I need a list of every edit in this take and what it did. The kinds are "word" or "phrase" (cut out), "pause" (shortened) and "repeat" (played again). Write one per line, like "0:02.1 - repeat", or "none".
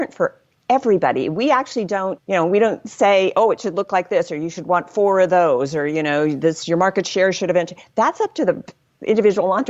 none

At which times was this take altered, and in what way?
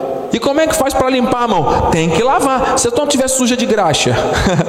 0:03.1 - word

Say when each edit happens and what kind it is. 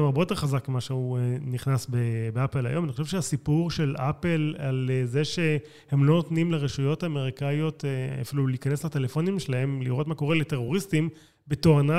none

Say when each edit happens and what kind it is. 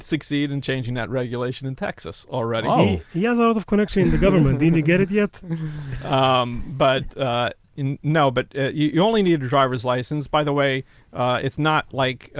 none

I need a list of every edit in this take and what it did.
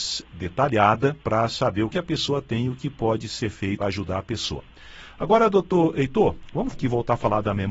0:01.2 - pause
0:01.9 - word
0:03.8 - word
0:06.7 - word

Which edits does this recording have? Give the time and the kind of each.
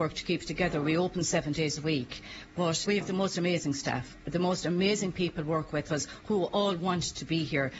0:02.8 - word

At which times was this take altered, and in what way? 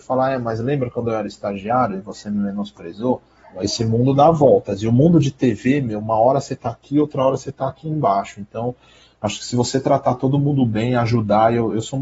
0:03.4 - pause

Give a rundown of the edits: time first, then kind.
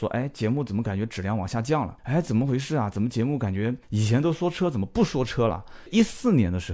0:02.0 - pause
0:03.8 - pause

